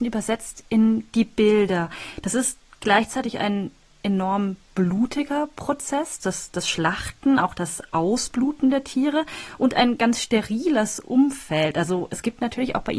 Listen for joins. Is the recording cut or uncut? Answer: uncut